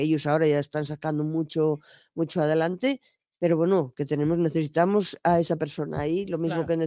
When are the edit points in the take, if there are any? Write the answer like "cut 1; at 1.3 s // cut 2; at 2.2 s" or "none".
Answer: none

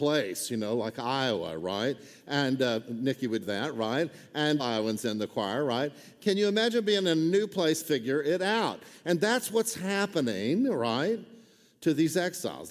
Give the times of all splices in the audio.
cut 1; at 3.4 s // cut 2; at 4.6 s // cut 3; at 7.8 s

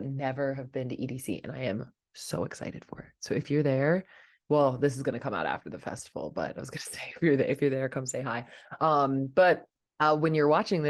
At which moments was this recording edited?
none

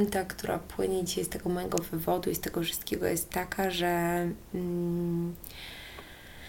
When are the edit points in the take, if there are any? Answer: none

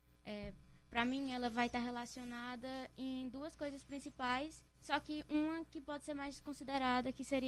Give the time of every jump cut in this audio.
cut 1; at 4.7 s

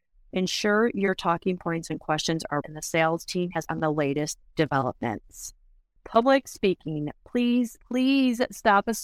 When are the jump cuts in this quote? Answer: cut 1; at 2.6 s // cut 2; at 3.7 s // cut 3; at 7.8 s

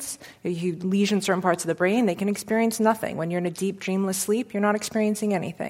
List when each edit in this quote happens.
none

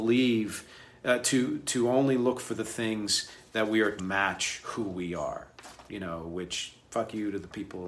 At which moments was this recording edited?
cut 1; at 4.0 s

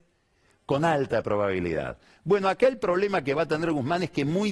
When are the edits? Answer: none

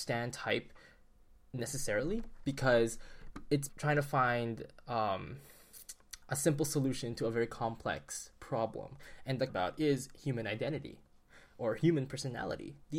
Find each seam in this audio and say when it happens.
cut 1; at 3.7 s // cut 2; at 6.2 s // cut 3; at 9.5 s

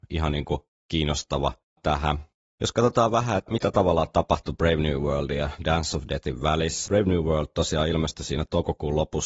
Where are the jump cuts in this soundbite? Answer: cut 1; at 1.8 s // cut 2; at 3.5 s // cut 3; at 6.9 s

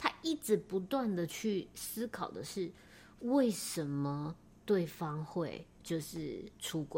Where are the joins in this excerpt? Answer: cut 1; at 5.7 s

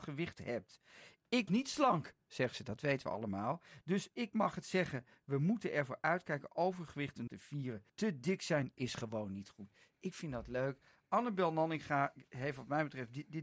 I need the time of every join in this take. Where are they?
cut 1; at 1.5 s // cut 2; at 7.3 s // cut 3; at 7.9 s

